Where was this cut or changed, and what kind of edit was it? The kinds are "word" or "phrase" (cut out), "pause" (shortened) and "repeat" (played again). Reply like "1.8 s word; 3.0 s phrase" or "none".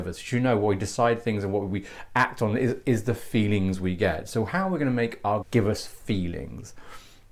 5.4 s word

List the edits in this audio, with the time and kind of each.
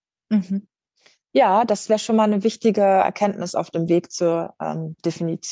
none

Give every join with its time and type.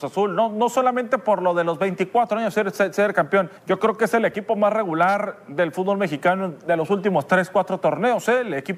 3.6 s pause

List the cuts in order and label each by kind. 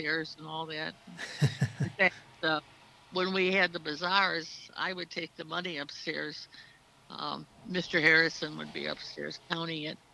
none

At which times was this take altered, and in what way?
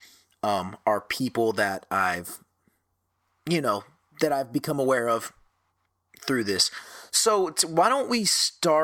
none

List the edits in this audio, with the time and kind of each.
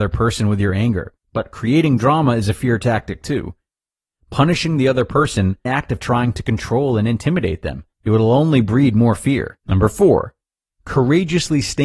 1.2 s pause; 5.7 s phrase; 7.9 s pause; 9.6 s pause

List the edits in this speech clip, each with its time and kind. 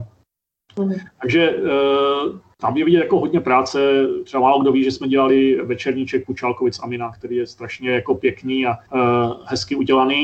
8.8 s pause

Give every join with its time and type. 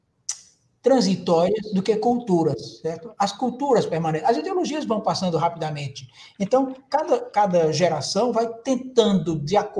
none

